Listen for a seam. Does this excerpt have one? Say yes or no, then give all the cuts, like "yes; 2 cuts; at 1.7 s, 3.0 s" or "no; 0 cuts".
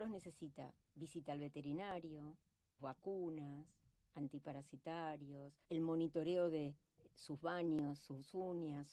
yes; 2 cuts; at 2.8 s, 5.6 s